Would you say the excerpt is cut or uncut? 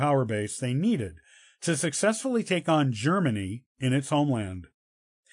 uncut